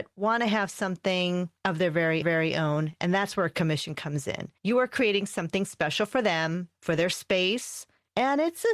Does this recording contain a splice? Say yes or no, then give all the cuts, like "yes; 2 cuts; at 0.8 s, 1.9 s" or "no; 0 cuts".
yes; 2 cuts; at 2.2 s, 4.6 s